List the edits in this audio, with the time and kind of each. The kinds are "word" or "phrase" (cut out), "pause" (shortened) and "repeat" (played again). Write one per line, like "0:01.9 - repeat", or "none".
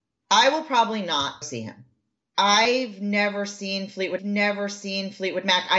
0:01.4 - word
0:04.2 - repeat